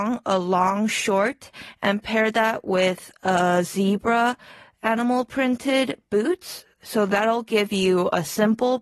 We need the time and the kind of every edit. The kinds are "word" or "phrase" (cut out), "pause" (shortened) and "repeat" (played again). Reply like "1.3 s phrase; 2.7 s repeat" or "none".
none